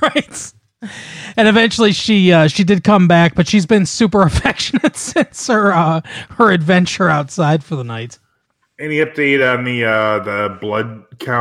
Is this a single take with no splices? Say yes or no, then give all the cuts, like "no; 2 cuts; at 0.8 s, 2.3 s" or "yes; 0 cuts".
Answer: yes; 0 cuts